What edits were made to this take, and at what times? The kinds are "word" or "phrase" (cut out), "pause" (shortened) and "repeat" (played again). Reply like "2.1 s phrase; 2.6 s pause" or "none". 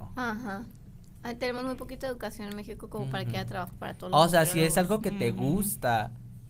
none

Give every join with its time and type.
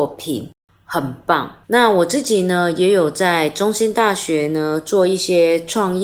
1.6 s pause

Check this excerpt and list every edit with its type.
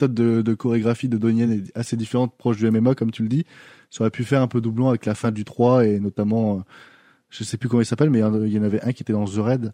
none

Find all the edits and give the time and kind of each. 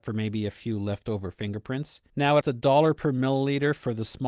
2.1 s pause; 2.4 s word

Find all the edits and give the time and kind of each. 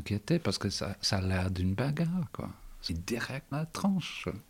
2.9 s phrase; 3.5 s word

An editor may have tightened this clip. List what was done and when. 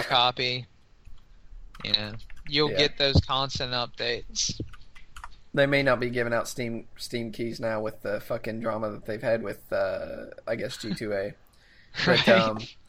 none

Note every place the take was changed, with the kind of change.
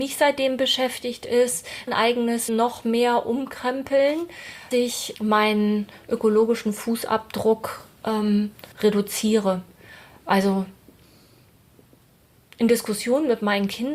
1.9 s phrase; 2.5 s word; 4.7 s word; 5.1 s word; 8.7 s pause

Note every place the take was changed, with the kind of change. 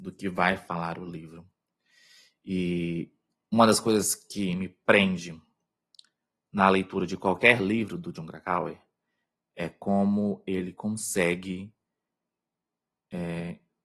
none

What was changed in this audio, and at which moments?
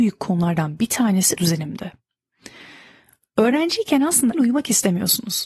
1.4 s word; 4.3 s word

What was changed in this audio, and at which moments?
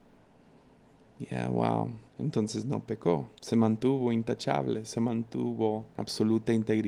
2.1 s pause; 3.4 s pause; 5.9 s pause

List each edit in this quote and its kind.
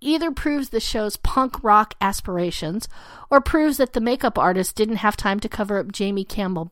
none

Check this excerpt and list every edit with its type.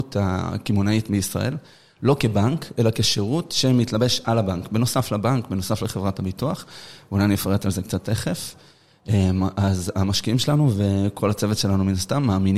none

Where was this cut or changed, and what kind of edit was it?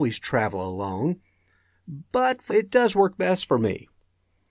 2.5 s word

